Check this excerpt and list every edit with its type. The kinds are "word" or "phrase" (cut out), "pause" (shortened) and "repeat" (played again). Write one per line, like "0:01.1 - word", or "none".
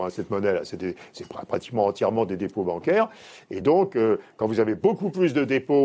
none